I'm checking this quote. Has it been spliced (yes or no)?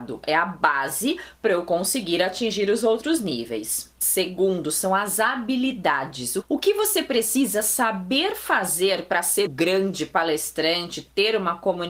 yes